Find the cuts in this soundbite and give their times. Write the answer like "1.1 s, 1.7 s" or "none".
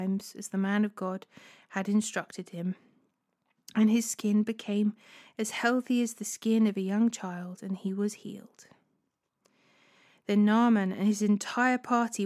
none